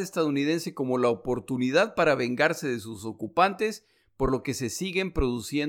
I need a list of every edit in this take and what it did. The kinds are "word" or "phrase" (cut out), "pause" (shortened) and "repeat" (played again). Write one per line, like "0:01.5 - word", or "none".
none